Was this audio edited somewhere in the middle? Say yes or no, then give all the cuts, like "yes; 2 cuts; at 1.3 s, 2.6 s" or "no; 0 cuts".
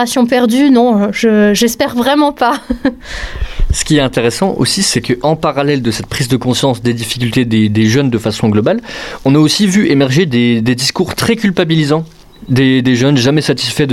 no; 0 cuts